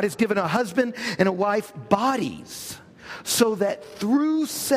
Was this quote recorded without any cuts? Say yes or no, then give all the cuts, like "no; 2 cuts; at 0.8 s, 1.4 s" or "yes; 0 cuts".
yes; 0 cuts